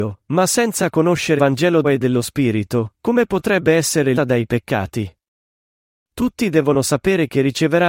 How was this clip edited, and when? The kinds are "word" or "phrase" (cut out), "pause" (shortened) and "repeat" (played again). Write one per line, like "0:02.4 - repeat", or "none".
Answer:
0:01.4 - word
0:01.8 - word
0:04.1 - word